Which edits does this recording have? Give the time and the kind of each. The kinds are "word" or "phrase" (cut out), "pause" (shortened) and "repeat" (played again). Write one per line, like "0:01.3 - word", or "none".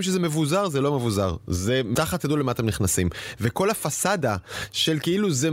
0:02.2 - phrase

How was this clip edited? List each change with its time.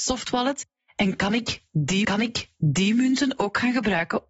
0:02.0 - repeat

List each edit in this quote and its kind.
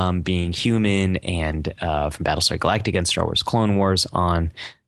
none

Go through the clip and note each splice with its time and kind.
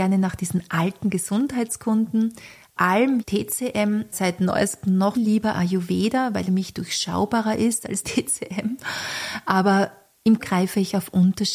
0:02.8 - word
0:03.2 - word
0:04.1 - word
0:05.1 - word
0:06.4 - word
0:08.0 - word
0:10.4 - word

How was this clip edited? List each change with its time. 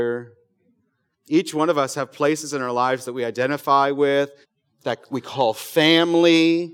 0:04.4 - pause

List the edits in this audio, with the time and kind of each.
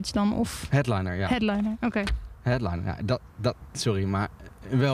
none

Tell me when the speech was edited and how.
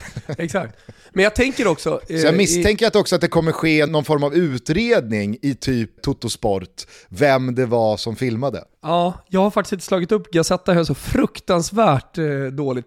0:03.9 - word
0:06.0 - word

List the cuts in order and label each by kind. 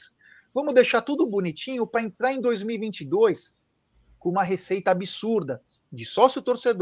none

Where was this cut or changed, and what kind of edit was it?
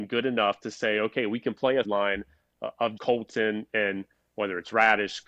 0:01.8 - word
0:03.0 - word

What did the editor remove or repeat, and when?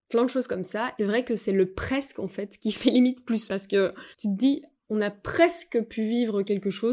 0:01.0 - word
0:03.5 - word
0:04.1 - pause

